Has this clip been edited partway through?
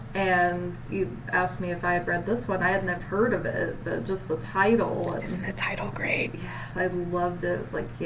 yes; 1 cut; at 3.0 s

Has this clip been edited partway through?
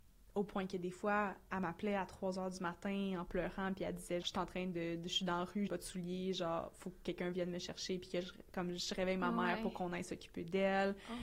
yes; 2 cuts; at 4.2 s, 5.7 s

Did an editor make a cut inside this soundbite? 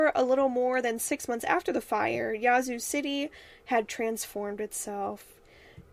no; 0 cuts

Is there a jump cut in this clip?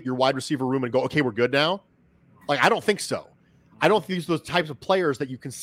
no; 0 cuts

